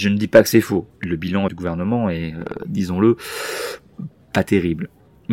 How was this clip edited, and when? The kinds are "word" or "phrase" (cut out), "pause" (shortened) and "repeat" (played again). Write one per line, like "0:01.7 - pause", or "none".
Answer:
0:00.9 - pause
0:01.5 - word